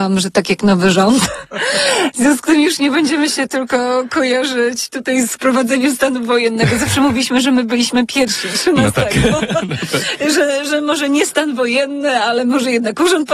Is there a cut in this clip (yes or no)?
yes